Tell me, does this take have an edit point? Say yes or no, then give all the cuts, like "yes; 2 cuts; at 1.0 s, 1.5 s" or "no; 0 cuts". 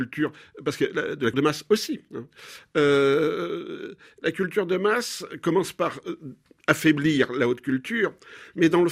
yes; 1 cut; at 1.3 s